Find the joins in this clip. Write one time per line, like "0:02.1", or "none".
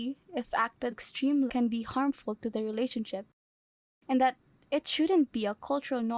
0:00.9
0:01.5